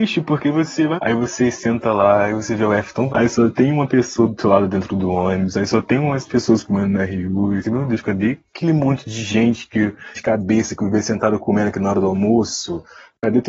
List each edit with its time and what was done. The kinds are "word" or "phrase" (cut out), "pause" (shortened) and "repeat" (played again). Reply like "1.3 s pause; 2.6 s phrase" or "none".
1.0 s phrase; 3.1 s word; 6.3 s word; 7.6 s word; 10.1 s phrase

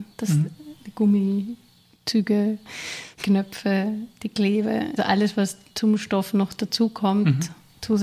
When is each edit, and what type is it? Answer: 3.2 s word; 5.0 s word

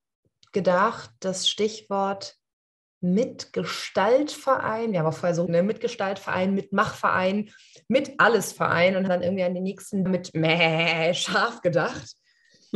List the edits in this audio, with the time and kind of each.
5.5 s word; 9.1 s word; 10.1 s word

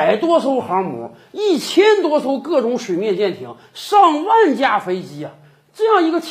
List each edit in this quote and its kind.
none

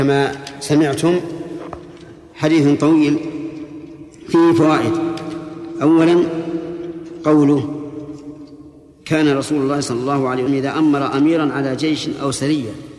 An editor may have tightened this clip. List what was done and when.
10.5 s word

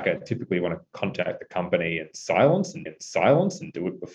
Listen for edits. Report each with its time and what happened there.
2.9 s repeat

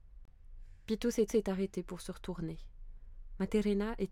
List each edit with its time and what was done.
1.3 s repeat

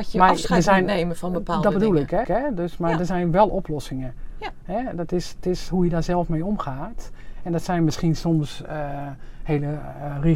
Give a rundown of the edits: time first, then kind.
2.2 s repeat

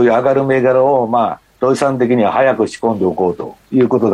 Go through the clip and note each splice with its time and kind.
1.5 s pause

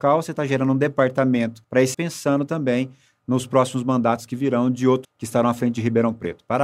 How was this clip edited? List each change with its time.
1.6 s pause; 1.9 s word; 5.0 s word

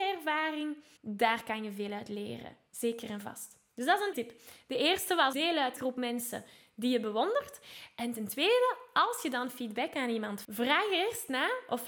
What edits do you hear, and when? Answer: 1.0 s pause; 4.1 s word; 5.3 s word; 5.8 s phrase; 10.4 s word

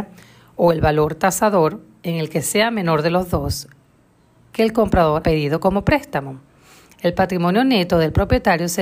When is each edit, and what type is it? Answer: 5.2 s word

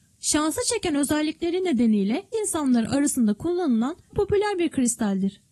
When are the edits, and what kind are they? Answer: 2.3 s word; 4.1 s word

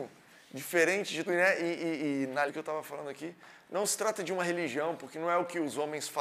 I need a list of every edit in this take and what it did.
1.3 s word; 2.5 s word

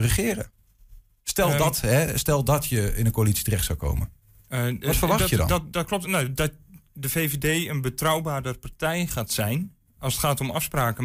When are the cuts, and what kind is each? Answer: none

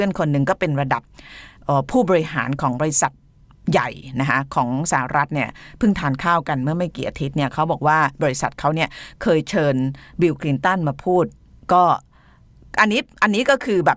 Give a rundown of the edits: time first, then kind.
11.5 s pause

